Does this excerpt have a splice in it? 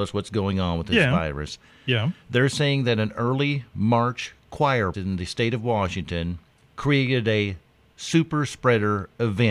yes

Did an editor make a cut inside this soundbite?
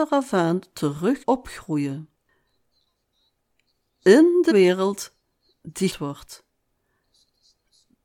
yes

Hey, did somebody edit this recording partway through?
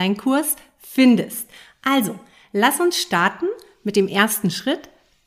no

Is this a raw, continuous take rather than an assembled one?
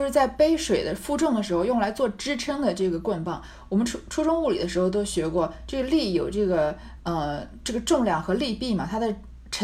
yes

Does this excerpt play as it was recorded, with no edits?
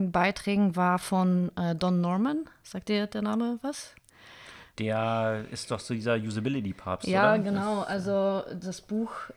yes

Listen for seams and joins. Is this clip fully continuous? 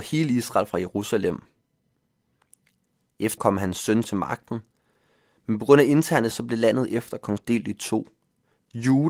no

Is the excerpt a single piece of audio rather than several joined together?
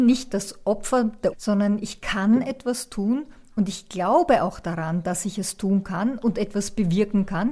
no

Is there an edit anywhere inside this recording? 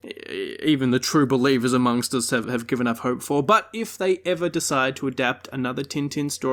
yes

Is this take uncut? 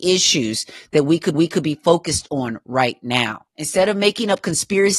no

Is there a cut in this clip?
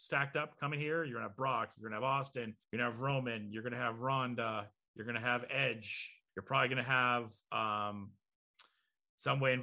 yes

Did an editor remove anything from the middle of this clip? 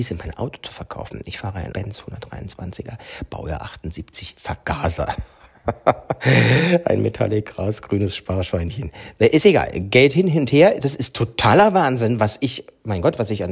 yes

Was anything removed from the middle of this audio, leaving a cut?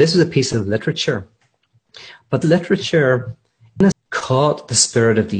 yes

